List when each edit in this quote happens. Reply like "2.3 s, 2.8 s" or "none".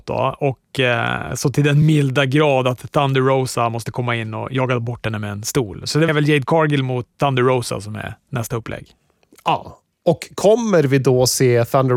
6.1 s